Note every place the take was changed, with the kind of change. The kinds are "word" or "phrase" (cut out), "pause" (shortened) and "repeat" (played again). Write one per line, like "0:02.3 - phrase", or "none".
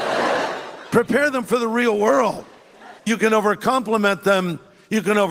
0:03.0 - pause